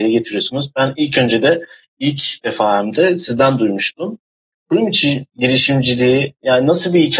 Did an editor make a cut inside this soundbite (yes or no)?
no